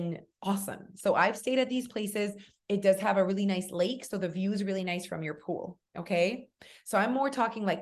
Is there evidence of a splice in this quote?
no; 0 cuts

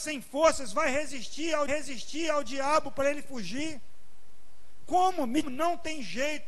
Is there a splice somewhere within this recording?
yes; 2 cuts; at 1.7 s, 5.4 s

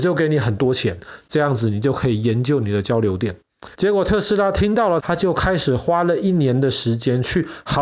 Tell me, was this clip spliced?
yes; 2 cuts; at 3.7 s, 5.0 s

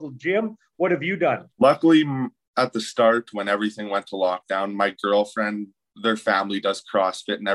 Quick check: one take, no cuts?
yes; 0 cuts

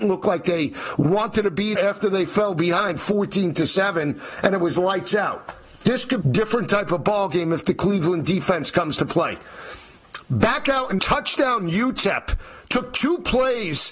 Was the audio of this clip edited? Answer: yes; 3 cuts; at 1.7 s, 6.2 s, 11.0 s

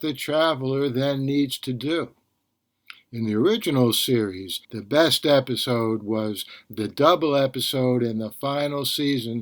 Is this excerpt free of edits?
no; 1 cut; at 4.6 s

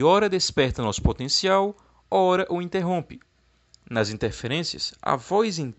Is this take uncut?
yes; 0 cuts

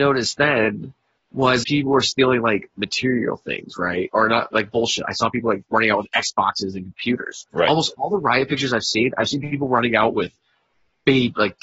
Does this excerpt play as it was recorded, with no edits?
no; 3 cuts; at 1.6 s, 4.5 s, 7.5 s

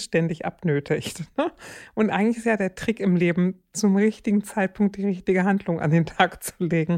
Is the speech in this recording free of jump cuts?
yes; 0 cuts

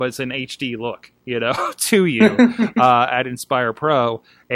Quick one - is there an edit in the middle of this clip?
no; 0 cuts

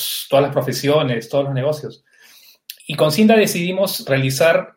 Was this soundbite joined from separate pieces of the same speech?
yes; 1 cut; at 2.8 s

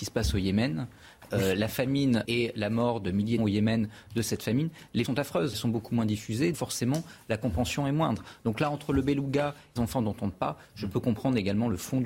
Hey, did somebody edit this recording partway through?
yes; 7 cuts; at 2.2 s, 3.4 s, 5.0 s, 5.5 s, 6.5 s, 9.8 s, 10.3 s

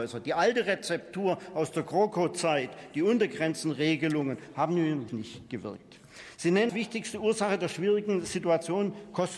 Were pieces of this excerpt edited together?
yes; 2 cuts; at 5.1 s, 6.7 s

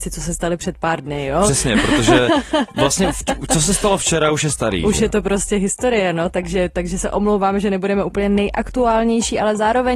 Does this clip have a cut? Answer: no; 0 cuts

